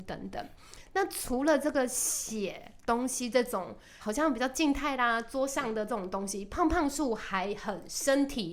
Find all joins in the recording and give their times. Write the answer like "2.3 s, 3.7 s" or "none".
4.0 s